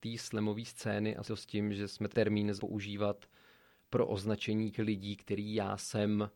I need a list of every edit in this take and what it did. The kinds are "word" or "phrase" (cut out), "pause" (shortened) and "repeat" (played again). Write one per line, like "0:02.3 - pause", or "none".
0:01.2 - word
0:02.1 - word
0:02.6 - word
0:04.7 - word